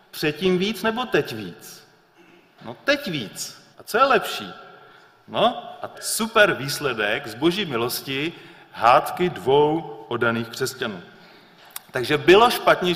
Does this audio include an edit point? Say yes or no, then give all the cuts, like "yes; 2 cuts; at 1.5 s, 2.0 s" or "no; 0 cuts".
yes; 2 cuts; at 3.7 s, 5.9 s